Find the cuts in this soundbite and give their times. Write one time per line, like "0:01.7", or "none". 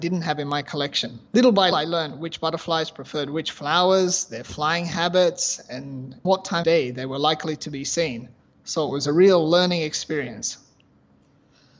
0:01.3
0:01.7
0:06.2
0:06.6